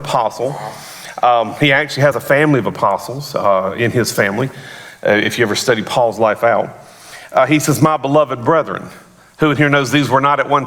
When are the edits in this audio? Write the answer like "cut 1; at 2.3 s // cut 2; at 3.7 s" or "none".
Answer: none